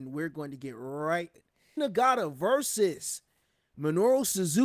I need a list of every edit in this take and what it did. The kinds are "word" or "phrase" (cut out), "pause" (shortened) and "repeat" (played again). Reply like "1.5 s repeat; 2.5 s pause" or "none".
1.3 s word; 1.8 s word